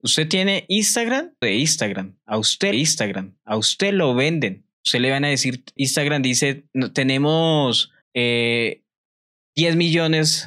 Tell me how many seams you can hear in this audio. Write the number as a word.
five